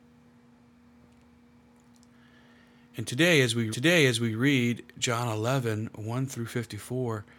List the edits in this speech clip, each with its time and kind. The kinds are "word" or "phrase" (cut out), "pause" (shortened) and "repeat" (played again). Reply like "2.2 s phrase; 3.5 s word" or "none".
3.7 s repeat